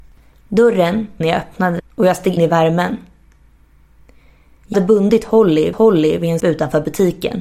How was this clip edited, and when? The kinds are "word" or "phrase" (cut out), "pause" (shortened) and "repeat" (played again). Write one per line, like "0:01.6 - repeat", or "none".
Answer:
0:01.2 - phrase
0:01.8 - word
0:02.4 - word
0:04.7 - word
0:05.7 - repeat
0:06.4 - word